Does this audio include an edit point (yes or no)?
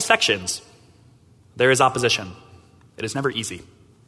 no